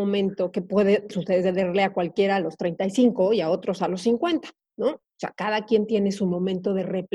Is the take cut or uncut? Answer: uncut